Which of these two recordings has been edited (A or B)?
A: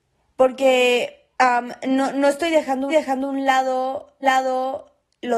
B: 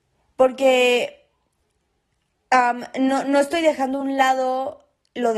A